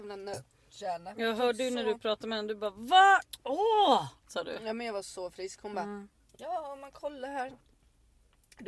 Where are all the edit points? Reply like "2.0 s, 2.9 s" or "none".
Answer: none